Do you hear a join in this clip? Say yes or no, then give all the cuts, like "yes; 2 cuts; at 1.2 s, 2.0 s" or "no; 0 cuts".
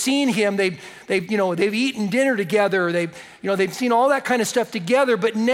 no; 0 cuts